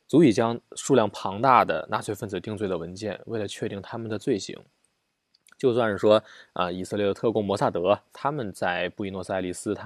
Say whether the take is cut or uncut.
uncut